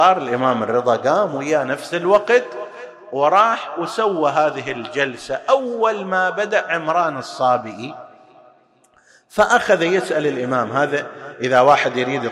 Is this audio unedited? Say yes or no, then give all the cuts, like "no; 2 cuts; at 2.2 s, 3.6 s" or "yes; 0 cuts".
yes; 0 cuts